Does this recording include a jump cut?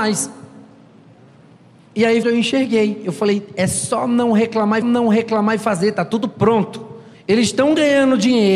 yes; 3 cuts; at 2.2 s, 4.8 s, 7.1 s

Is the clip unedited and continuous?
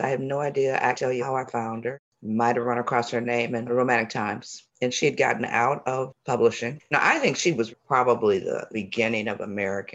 no; 3 cuts; at 0.9 s, 4.7 s, 7.7 s

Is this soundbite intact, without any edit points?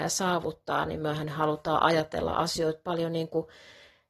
yes; 0 cuts

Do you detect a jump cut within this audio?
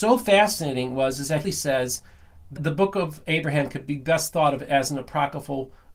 yes; 2 cuts; at 1.4 s, 2.6 s

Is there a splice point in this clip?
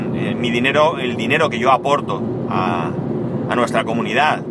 no; 0 cuts

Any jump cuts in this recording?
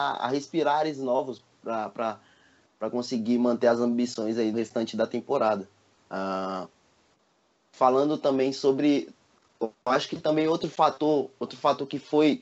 yes; 1 cut; at 4.5 s

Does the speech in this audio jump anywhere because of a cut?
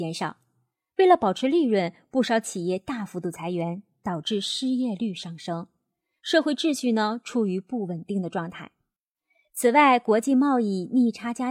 no; 0 cuts

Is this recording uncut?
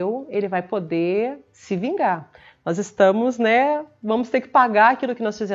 yes; 0 cuts

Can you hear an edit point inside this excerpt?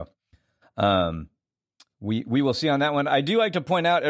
no; 0 cuts

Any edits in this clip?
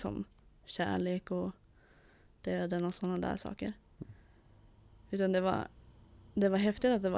no; 0 cuts

